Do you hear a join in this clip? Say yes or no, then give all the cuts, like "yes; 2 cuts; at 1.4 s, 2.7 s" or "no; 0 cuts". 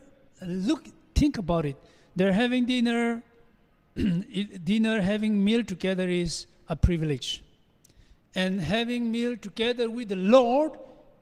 no; 0 cuts